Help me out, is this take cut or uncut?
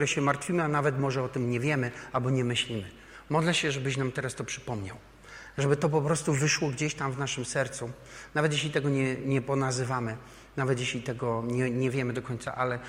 uncut